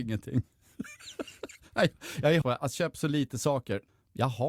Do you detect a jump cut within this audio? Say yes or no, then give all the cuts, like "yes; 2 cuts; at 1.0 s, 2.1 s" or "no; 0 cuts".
yes; 2 cuts; at 2.4 s, 2.7 s